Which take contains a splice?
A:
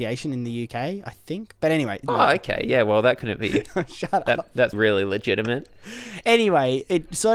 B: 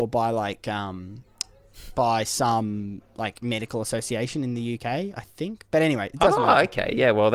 A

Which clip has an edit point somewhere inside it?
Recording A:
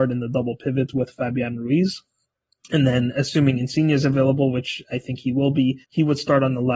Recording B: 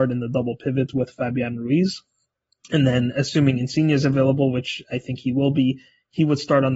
A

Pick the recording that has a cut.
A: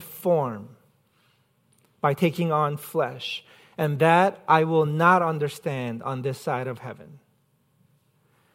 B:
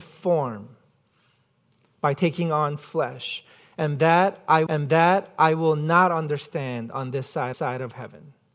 B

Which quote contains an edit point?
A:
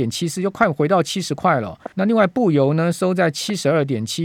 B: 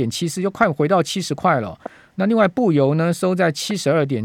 A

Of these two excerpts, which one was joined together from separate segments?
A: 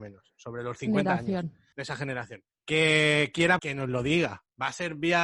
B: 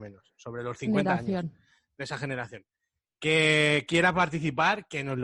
A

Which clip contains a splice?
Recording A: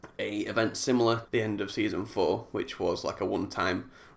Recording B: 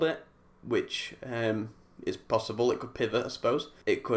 A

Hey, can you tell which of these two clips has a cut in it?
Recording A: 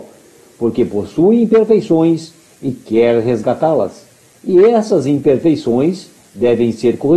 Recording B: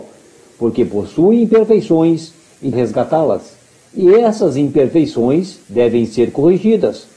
B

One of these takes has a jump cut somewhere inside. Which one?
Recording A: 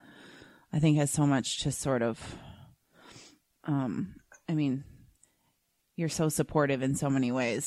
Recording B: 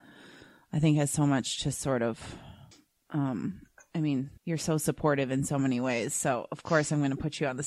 B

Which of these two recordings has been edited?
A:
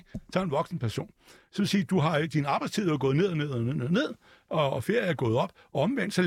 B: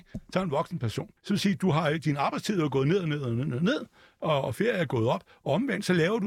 B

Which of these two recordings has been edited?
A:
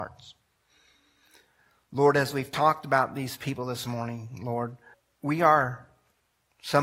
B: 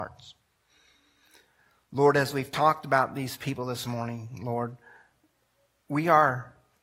A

